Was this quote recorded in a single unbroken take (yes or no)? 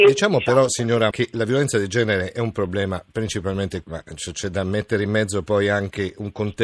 no